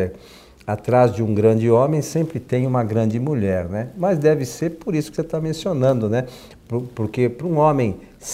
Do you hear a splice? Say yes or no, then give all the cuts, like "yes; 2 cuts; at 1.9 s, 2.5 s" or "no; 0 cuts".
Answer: no; 0 cuts